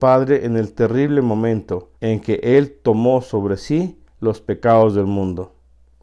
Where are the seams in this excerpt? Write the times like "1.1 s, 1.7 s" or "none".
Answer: 2.0 s, 4.1 s